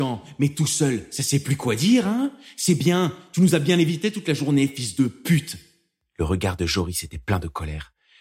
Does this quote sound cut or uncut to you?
uncut